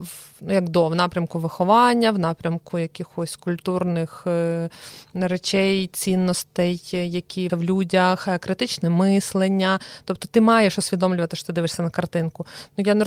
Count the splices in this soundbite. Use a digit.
1